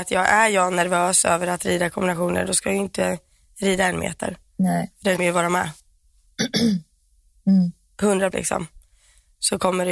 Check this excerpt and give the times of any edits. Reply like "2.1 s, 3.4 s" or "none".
5.2 s, 8.3 s